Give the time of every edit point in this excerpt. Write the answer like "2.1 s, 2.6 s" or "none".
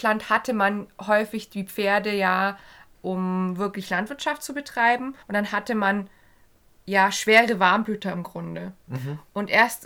2.9 s, 5.2 s